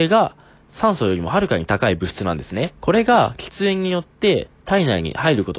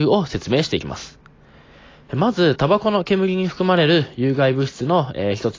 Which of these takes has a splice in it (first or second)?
first